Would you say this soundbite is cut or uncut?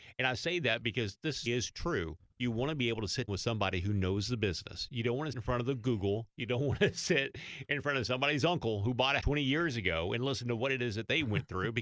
cut